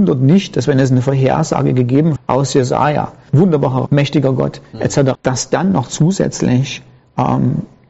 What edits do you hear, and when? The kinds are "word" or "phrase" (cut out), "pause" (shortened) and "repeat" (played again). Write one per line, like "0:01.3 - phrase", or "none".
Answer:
0:02.2 - word
0:03.3 - word
0:03.9 - word
0:05.1 - word